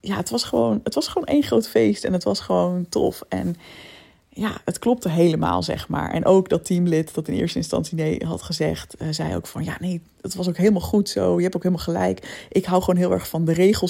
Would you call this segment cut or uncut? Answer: uncut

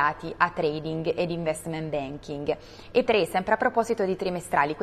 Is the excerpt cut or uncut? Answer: cut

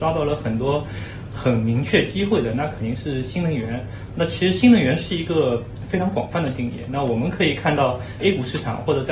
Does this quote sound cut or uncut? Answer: cut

